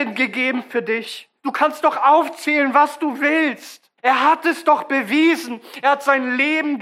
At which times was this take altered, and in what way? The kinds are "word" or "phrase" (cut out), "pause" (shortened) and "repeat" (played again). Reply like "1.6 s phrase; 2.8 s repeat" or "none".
1.4 s pause; 4.0 s pause

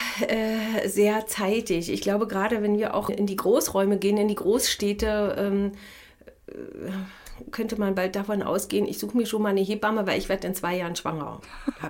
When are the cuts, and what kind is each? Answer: 3.1 s word

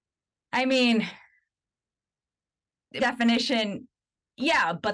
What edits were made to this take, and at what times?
3.0 s word

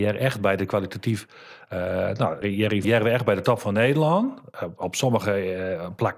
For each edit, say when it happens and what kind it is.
2.4 s word; 2.8 s word

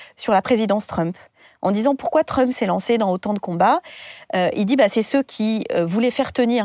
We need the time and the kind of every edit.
none

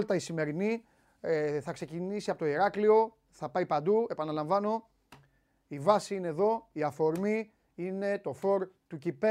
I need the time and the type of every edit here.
8.4 s word

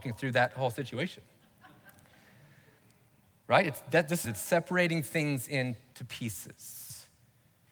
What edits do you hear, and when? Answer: 4.2 s phrase

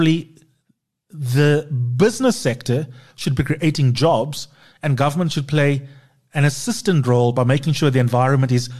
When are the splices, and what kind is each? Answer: none

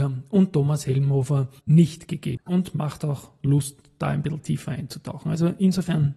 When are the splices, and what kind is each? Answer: 1.6 s word

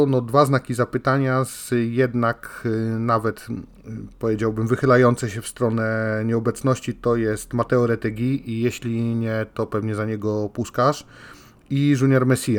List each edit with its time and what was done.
none

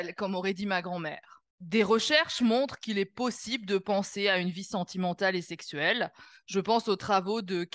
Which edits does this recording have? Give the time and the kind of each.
1.5 s pause

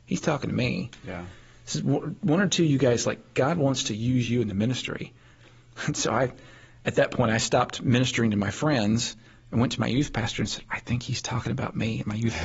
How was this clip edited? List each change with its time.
none

